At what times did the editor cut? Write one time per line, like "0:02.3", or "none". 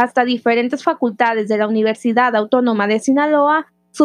none